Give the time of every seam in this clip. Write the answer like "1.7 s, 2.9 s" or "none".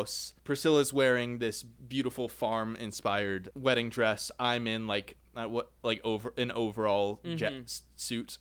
1.8 s